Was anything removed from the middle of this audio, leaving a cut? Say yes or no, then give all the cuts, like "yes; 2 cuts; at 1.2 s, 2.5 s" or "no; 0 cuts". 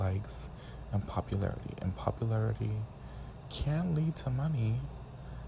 no; 0 cuts